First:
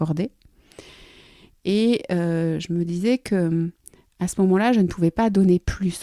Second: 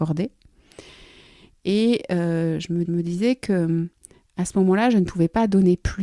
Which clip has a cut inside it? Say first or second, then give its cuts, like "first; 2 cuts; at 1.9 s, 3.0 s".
second; 1 cut; at 2.9 s